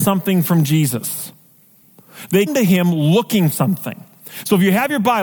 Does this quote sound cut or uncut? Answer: cut